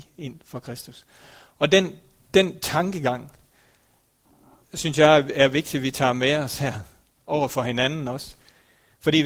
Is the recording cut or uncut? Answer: uncut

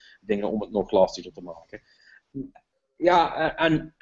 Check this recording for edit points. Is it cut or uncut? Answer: uncut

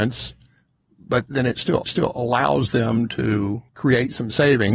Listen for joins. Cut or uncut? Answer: cut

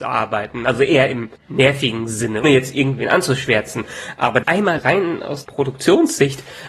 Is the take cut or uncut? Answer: cut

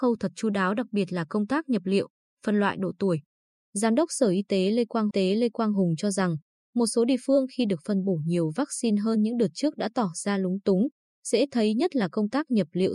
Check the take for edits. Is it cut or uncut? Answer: cut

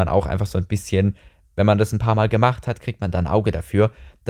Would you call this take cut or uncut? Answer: uncut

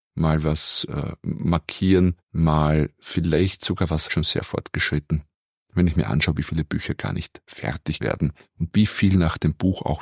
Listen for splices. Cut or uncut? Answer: cut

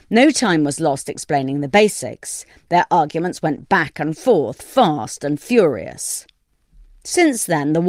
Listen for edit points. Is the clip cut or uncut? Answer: uncut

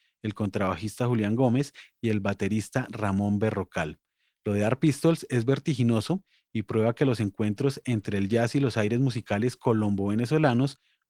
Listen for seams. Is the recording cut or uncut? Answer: uncut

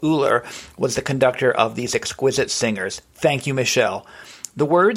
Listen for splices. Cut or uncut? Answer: uncut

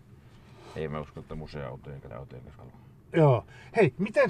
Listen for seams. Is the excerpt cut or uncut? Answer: cut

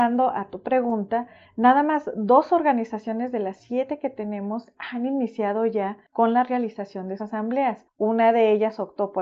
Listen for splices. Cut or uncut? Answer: cut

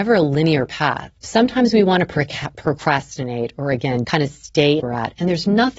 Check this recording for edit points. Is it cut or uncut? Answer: cut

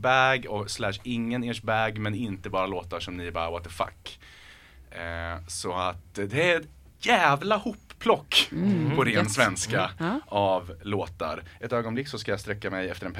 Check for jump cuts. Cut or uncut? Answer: cut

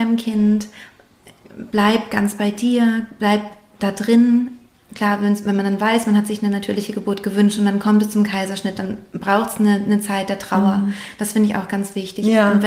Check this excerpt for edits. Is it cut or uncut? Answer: uncut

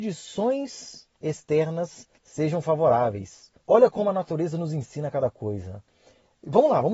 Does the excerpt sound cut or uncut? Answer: cut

